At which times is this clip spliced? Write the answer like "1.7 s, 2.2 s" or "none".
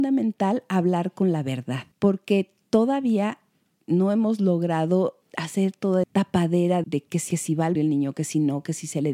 1.9 s, 5.2 s, 6.0 s, 6.8 s, 7.3 s, 7.8 s